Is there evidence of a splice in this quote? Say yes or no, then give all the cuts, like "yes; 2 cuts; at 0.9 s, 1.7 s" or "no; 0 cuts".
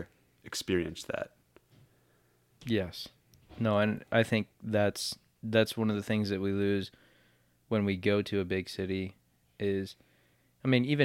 no; 0 cuts